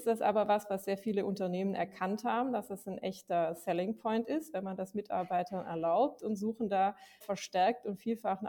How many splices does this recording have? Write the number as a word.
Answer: one